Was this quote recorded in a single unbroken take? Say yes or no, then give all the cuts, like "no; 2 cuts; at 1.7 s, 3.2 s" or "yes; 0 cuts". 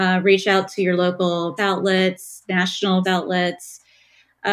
no; 2 cuts; at 1.6 s, 3.0 s